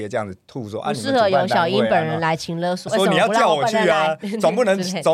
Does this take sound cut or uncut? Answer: cut